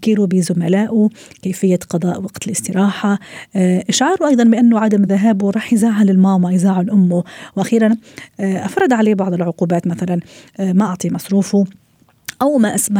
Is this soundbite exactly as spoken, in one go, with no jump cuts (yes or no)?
yes